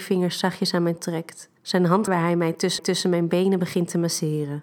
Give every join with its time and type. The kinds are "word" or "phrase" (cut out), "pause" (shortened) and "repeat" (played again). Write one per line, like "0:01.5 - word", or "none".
0:01.0 - word
0:01.6 - pause
0:02.1 - phrase
0:02.8 - repeat